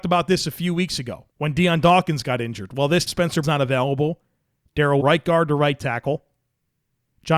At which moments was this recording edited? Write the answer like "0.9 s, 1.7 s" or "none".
1.3 s, 3.1 s, 3.4 s, 5.0 s